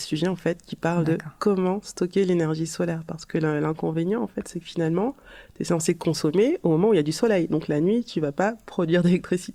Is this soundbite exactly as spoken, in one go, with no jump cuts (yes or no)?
yes